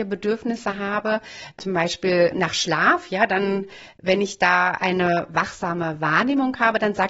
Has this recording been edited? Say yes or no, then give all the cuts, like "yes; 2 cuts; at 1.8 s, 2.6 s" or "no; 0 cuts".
no; 0 cuts